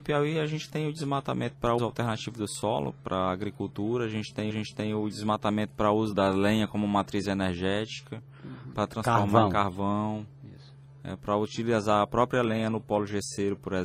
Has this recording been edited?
yes; 3 cuts; at 1.8 s, 4.5 s, 6.1 s

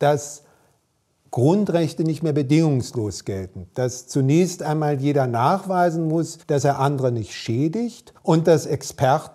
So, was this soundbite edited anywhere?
yes; 2 cuts; at 6.4 s, 8.2 s

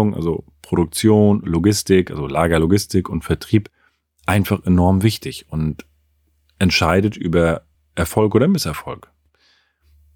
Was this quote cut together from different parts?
no; 0 cuts

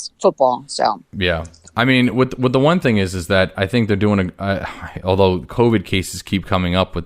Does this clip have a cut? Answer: no; 0 cuts

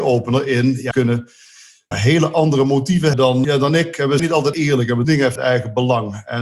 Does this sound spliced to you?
yes; 8 cuts; at 0.9 s, 1.9 s, 3.1 s, 3.4 s, 4.2 s, 4.5 s, 5.0 s, 5.4 s

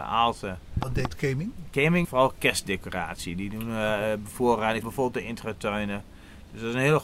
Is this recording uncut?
no; 2 cuts; at 2.0 s, 4.8 s

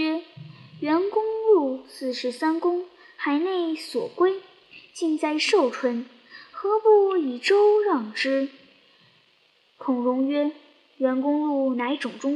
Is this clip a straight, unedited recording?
yes; 0 cuts

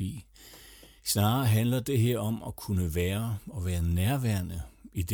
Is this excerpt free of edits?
yes; 0 cuts

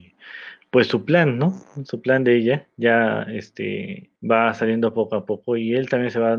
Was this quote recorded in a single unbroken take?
no; 1 cut; at 4.2 s

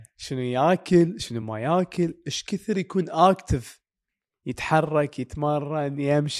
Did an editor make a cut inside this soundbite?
no; 0 cuts

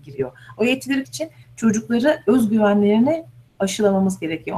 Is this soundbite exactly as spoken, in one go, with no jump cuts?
no; 1 cut; at 1.0 s

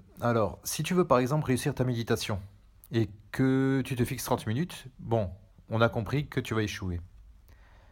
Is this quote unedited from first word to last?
yes; 0 cuts

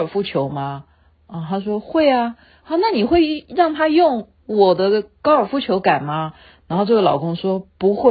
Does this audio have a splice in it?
no; 0 cuts

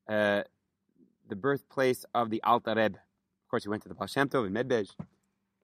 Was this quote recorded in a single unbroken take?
yes; 0 cuts

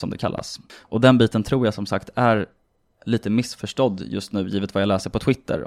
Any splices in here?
no; 0 cuts

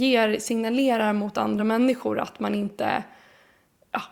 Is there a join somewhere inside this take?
no; 0 cuts

